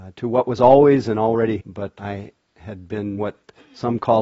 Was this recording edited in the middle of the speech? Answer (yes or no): yes